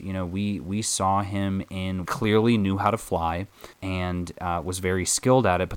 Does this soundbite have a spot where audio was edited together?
yes; 2 cuts; at 2.0 s, 3.7 s

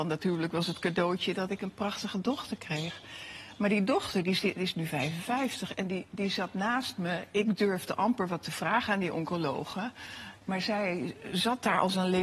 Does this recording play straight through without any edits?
yes; 0 cuts

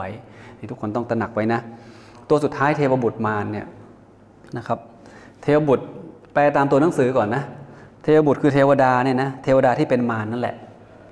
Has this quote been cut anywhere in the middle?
no; 0 cuts

